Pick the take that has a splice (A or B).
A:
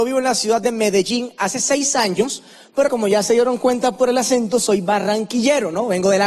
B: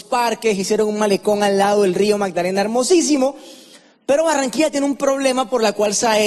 A